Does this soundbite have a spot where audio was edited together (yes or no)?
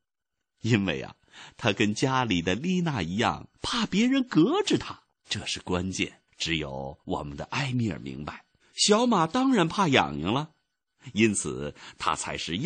yes